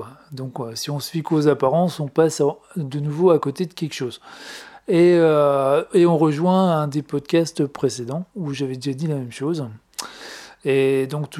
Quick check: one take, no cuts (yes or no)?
no